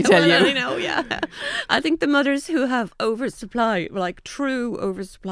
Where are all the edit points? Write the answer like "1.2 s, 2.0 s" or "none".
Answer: none